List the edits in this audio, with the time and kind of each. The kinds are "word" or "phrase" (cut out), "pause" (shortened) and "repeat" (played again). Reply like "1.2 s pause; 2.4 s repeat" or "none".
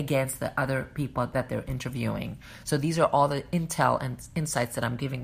none